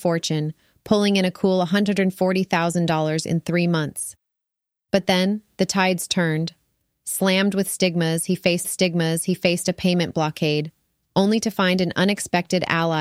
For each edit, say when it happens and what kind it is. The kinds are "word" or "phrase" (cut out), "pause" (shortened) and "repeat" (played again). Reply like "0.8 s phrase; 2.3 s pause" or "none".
8.6 s repeat

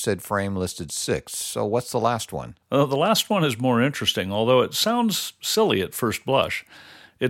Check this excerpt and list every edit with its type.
2.6 s pause

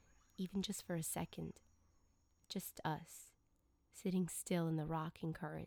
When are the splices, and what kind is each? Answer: none

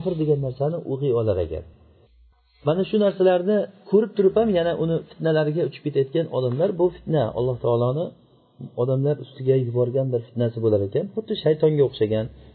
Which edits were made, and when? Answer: none

